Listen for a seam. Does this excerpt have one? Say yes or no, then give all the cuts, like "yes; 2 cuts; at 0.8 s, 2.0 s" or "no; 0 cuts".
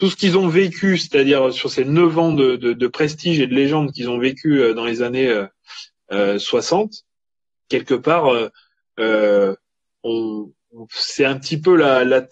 no; 0 cuts